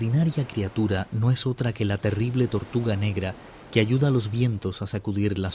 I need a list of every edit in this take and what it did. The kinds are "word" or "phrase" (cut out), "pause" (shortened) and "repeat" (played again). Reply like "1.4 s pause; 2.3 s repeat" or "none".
none

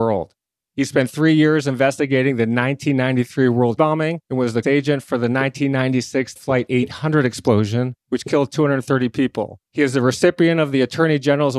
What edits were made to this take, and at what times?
3.8 s word; 4.2 s pause; 4.6 s phrase; 6.4 s word; 8.0 s pause; 9.7 s pause

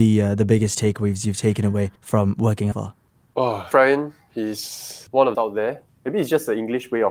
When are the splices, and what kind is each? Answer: 2.0 s pause; 2.7 s phrase; 3.7 s word; 5.3 s phrase

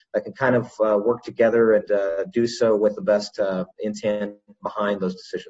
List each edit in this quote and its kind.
1.9 s word; 3.7 s pause

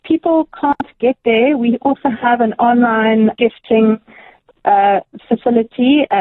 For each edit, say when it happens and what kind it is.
3.3 s word

